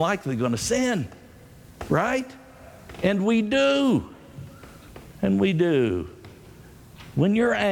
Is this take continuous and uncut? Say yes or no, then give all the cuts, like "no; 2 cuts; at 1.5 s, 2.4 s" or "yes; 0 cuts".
yes; 0 cuts